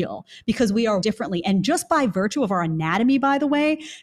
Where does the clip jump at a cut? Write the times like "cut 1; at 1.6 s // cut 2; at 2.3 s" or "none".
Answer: cut 1; at 1.0 s